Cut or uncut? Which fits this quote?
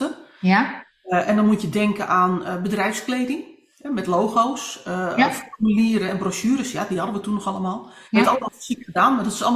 cut